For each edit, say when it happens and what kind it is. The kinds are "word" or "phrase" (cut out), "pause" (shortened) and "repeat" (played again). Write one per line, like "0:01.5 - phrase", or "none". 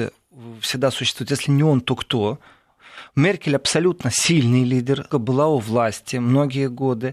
0:05.1 - word